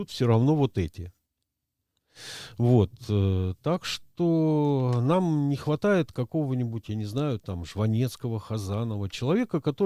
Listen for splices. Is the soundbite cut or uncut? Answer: uncut